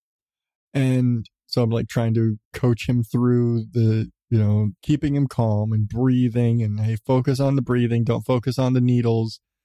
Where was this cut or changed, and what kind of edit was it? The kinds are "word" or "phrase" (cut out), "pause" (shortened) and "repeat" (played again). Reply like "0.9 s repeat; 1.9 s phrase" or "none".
2.4 s pause; 4.8 s pause